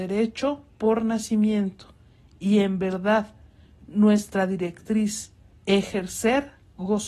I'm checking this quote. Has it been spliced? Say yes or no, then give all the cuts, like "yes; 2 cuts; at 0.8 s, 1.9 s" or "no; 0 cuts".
no; 0 cuts